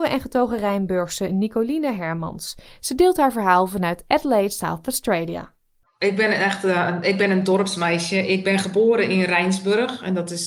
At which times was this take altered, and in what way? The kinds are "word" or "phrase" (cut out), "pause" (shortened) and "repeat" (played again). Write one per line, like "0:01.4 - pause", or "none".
none